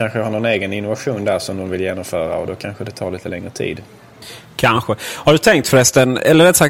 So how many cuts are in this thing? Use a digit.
0